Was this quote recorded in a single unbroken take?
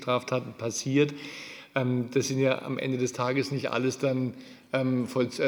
yes; 0 cuts

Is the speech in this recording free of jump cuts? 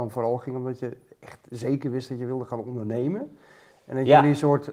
yes; 0 cuts

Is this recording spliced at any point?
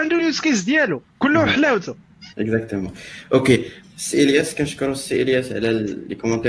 yes; 3 cuts; at 1.1 s, 2.3 s, 3.8 s

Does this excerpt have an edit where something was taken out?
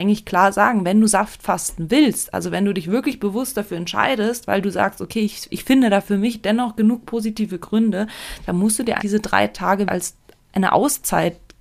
yes; 2 cuts; at 9.0 s, 9.9 s

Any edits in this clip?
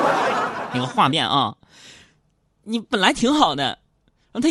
no; 0 cuts

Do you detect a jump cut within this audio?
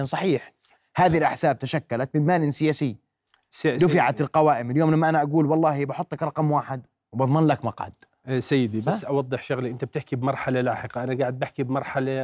no; 0 cuts

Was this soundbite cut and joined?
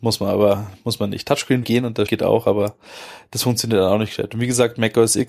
yes; 2 cuts; at 1.6 s, 2.1 s

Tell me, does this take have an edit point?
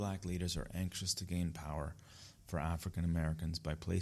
no; 0 cuts

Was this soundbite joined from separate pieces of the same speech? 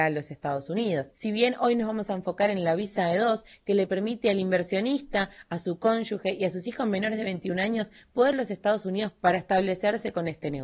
yes; 1 cut; at 8.3 s

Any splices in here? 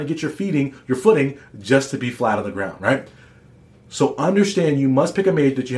no; 0 cuts

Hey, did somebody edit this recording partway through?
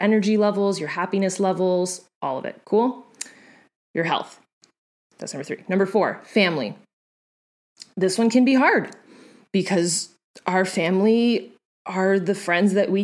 no; 0 cuts

